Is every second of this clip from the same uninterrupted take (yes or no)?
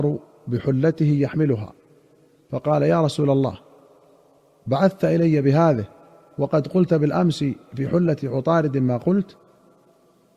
yes